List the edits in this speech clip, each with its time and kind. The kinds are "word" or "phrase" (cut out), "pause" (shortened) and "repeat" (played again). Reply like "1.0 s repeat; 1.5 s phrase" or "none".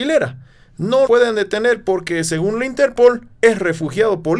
1.1 s word; 3.3 s pause